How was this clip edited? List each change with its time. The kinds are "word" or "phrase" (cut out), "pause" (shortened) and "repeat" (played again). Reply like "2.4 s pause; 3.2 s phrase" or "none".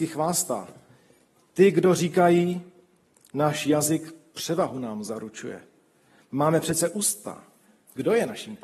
none